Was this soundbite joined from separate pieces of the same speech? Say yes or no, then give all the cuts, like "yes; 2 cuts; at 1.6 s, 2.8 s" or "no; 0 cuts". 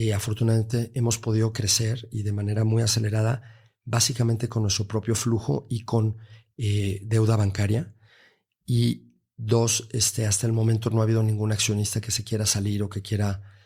no; 0 cuts